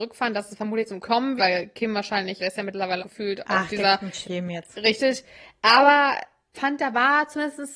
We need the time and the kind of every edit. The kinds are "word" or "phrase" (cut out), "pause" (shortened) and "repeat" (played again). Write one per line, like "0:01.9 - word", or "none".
0:01.0 - word
0:01.4 - word
0:02.4 - word
0:03.0 - word
0:04.2 - word
0:06.5 - word